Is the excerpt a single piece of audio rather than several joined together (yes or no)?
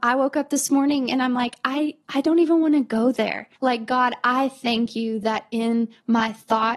no